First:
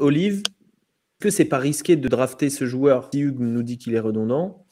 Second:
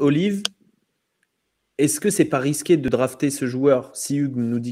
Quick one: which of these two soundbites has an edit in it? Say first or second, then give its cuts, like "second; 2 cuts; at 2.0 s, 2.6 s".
first; 2 cuts; at 1.2 s, 3.1 s